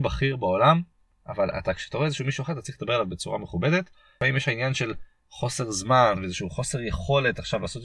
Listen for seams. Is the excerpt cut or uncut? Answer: uncut